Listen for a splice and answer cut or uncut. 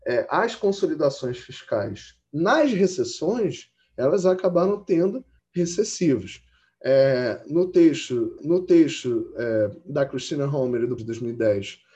cut